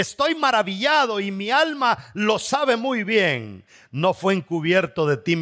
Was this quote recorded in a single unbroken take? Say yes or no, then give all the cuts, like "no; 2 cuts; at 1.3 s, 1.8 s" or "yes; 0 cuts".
yes; 0 cuts